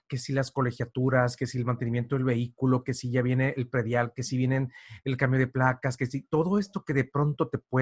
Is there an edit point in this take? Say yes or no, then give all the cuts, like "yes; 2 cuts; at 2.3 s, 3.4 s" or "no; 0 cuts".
no; 0 cuts